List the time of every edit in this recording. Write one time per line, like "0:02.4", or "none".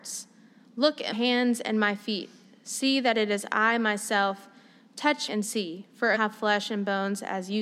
0:01.1
0:05.3
0:06.1